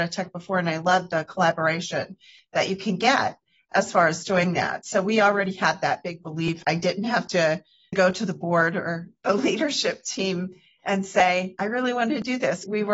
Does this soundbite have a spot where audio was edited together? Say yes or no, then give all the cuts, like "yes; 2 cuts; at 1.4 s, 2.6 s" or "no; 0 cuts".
no; 0 cuts